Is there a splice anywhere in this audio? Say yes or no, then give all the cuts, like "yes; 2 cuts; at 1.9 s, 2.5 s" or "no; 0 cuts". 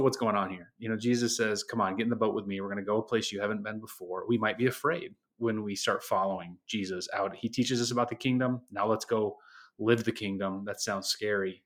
no; 0 cuts